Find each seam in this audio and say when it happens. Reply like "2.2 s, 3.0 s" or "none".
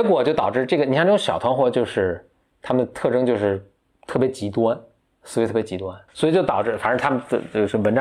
6.1 s

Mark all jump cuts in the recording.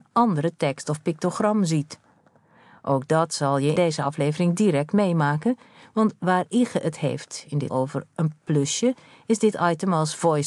3.8 s, 7.7 s

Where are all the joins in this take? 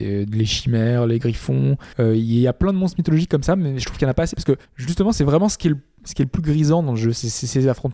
1.9 s, 4.6 s

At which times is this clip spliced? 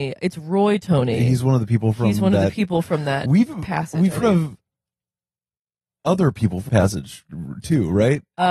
4.2 s, 6.7 s

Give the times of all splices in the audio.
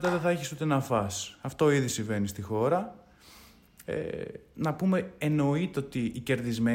none

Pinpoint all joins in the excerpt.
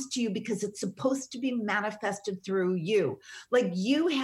none

